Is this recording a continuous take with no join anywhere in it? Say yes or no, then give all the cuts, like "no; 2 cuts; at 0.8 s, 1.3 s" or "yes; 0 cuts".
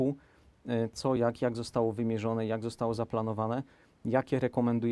yes; 0 cuts